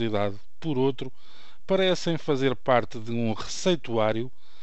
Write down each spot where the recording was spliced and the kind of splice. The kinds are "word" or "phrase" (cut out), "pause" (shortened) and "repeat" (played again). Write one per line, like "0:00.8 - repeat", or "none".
none